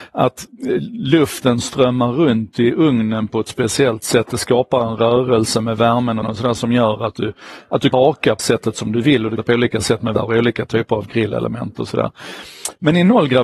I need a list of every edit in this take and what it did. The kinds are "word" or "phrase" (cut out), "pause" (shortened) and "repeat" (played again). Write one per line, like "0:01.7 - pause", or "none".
0:06.2 - phrase
0:07.9 - word
0:08.4 - word
0:09.4 - phrase
0:10.1 - word